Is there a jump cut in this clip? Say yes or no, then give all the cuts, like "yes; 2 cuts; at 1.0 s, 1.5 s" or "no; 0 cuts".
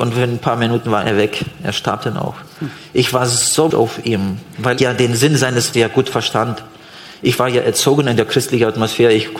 yes; 3 cuts; at 3.7 s, 4.8 s, 5.7 s